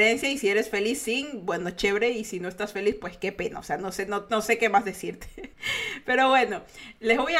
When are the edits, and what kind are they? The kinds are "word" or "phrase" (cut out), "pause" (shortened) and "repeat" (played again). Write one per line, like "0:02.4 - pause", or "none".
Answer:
0:05.5 - pause